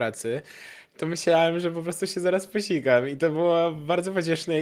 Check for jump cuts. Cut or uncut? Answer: uncut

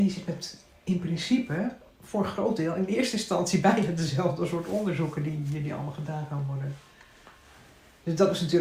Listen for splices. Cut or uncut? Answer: uncut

